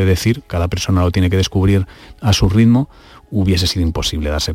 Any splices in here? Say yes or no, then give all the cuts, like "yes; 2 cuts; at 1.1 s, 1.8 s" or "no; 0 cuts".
no; 0 cuts